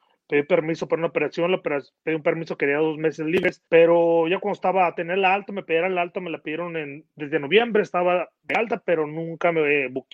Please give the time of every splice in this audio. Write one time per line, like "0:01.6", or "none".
0:03.7